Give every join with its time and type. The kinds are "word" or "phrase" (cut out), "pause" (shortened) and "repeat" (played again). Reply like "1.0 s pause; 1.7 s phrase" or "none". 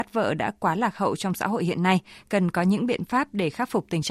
none